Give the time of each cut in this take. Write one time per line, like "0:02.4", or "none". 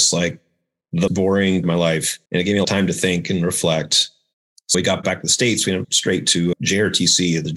0:01.1
0:01.6
0:02.3
0:02.6
0:04.7
0:05.8
0:06.5